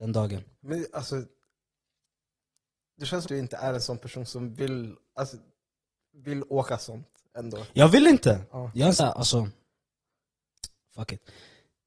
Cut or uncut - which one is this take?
cut